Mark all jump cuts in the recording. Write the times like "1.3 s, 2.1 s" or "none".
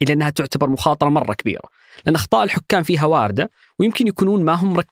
none

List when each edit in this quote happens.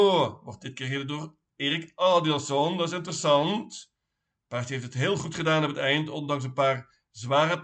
none

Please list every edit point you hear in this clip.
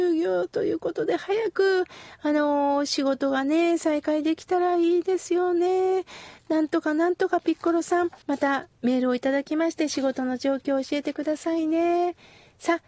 8.2 s

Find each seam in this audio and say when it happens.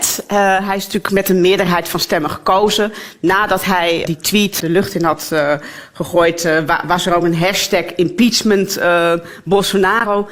4.0 s, 4.6 s

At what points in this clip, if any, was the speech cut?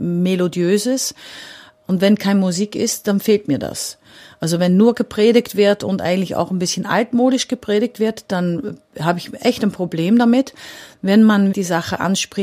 11.5 s

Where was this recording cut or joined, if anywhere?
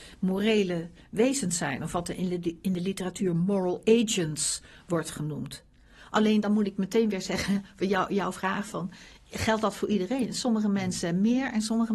none

